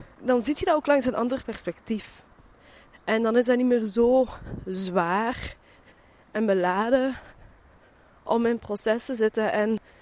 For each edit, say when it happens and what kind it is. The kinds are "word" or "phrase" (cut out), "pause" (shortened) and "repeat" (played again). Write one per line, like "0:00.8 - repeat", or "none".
none